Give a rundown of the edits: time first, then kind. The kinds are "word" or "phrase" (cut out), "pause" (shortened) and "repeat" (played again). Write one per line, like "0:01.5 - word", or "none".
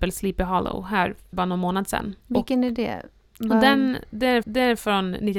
0:01.3 - word
0:02.2 - pause
0:04.4 - repeat